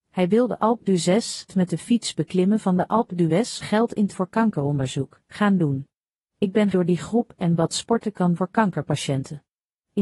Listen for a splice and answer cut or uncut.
cut